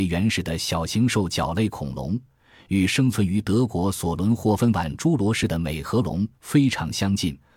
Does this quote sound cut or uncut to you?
uncut